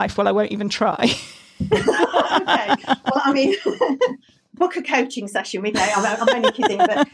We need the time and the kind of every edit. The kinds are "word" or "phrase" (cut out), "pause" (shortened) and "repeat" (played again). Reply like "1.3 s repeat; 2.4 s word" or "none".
5.7 s word